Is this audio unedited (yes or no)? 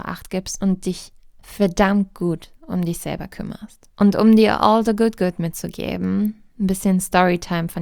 no